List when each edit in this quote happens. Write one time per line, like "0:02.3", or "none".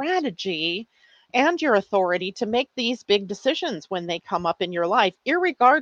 none